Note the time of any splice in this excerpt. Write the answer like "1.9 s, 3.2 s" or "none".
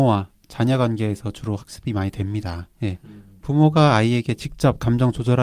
2.7 s

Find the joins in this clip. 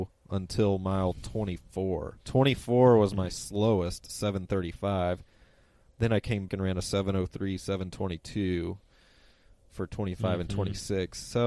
2.2 s, 6.5 s

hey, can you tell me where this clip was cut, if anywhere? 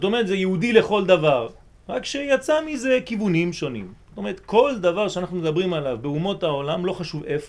none

